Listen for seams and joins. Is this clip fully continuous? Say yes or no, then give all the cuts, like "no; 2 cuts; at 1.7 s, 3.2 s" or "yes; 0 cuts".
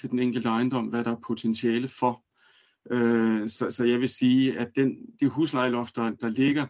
yes; 0 cuts